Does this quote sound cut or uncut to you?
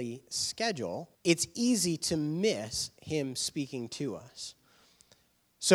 cut